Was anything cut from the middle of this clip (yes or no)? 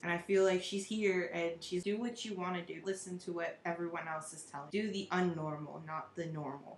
yes